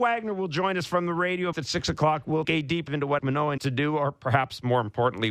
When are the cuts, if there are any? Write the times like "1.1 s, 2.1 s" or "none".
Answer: 1.5 s, 2.4 s, 2.9 s, 3.2 s, 3.6 s